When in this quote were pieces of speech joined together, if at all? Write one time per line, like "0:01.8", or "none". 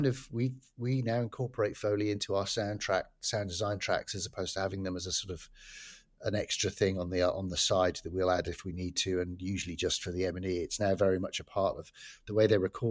none